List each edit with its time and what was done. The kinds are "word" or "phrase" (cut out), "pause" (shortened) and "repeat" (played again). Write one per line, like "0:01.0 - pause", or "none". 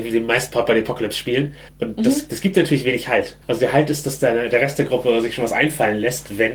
0:01.7 - pause
0:03.4 - pause